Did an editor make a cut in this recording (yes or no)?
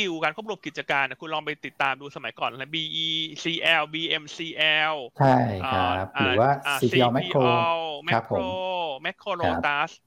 no